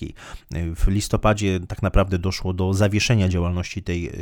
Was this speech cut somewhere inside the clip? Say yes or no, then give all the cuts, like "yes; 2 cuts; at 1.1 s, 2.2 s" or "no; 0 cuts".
no; 0 cuts